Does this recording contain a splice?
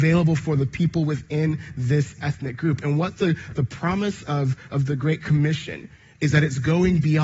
no; 0 cuts

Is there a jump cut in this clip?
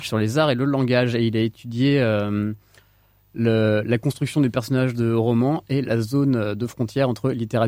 no; 0 cuts

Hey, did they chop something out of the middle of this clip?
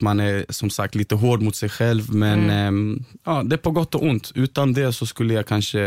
no; 0 cuts

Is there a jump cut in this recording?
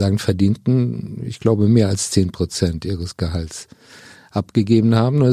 no; 0 cuts

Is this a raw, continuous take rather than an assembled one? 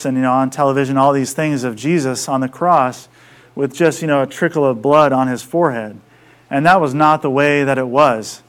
yes; 0 cuts

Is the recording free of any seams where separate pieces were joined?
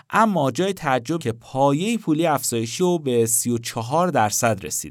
no; 2 cuts; at 1.2 s, 2.8 s

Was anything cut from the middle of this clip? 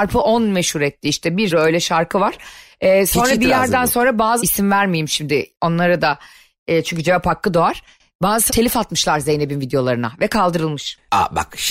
yes; 3 cuts; at 1.5 s, 4.4 s, 8.5 s

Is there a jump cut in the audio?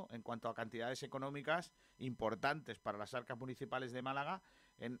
no; 0 cuts

